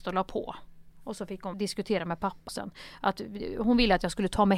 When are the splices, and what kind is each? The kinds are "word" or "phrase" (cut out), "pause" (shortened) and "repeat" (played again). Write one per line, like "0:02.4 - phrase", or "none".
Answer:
0:01.5 - word
0:02.5 - word

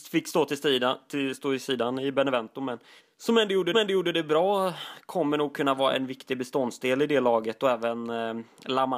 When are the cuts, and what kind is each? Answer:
0:03.0 - pause
0:03.7 - repeat

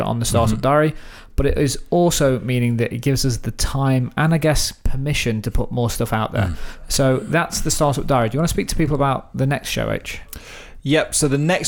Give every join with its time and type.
none

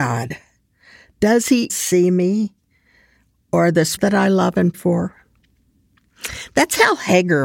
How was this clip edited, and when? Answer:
0:01.7 - word
0:04.0 - word
0:04.7 - word

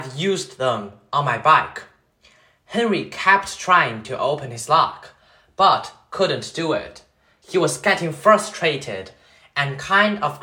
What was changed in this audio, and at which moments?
none

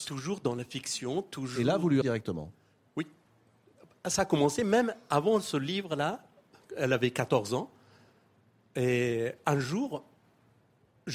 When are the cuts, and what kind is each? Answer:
0:02.0 - word

